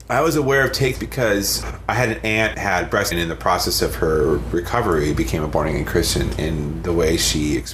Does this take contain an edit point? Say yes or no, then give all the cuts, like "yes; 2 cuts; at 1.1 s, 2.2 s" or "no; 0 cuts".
yes; 3 cuts; at 0.9 s, 2.5 s, 3.1 s